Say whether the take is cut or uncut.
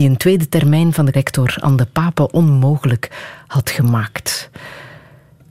cut